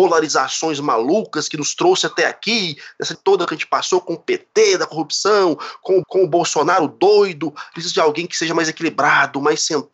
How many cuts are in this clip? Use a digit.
3